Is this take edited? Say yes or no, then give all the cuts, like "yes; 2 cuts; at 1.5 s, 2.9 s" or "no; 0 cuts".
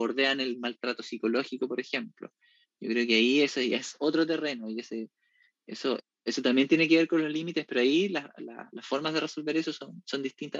no; 0 cuts